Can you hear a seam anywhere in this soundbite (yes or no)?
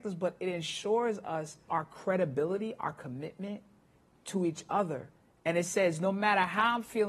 yes